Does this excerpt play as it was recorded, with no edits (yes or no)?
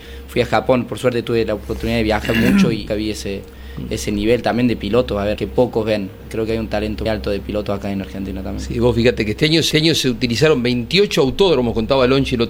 no